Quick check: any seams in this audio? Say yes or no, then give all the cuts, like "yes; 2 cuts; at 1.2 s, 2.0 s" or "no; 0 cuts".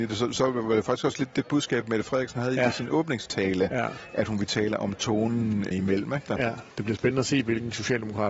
yes; 1 cut; at 5.7 s